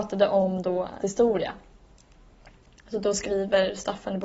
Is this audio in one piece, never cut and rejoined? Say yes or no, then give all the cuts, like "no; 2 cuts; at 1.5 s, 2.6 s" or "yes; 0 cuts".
no; 1 cut; at 1.0 s